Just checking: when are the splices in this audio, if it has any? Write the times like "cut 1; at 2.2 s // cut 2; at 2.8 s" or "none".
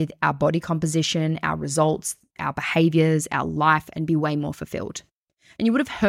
none